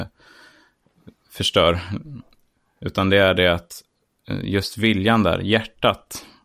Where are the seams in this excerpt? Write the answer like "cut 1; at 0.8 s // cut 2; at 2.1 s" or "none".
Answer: none